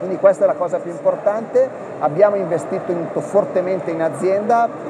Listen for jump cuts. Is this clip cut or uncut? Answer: cut